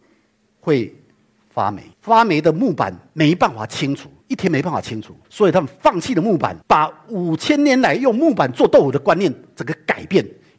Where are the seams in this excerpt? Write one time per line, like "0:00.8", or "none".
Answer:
0:01.9
0:05.2
0:06.6